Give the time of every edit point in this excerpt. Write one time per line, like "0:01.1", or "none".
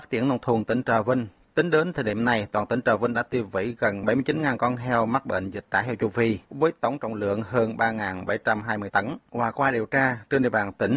0:06.4

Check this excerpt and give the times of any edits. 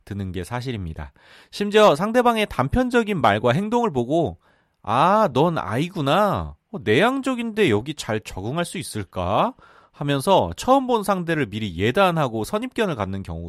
none

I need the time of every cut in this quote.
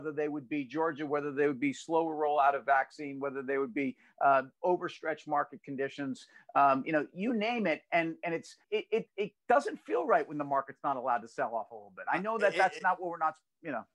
0:08.6
0:09.4

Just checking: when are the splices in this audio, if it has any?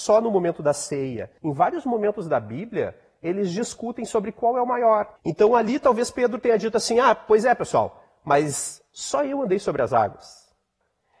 0:01.4
0:05.2

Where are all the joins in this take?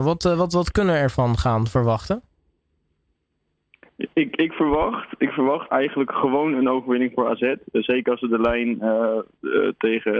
0:05.7

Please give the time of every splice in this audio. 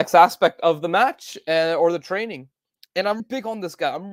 0:03.2

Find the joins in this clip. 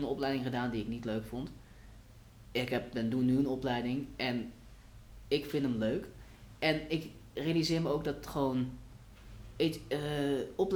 none

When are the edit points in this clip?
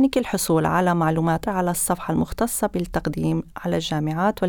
0:01.5
0:03.5

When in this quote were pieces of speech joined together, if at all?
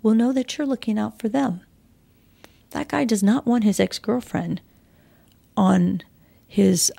none

